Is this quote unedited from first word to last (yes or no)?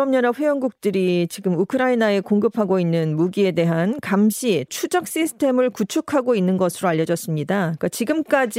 no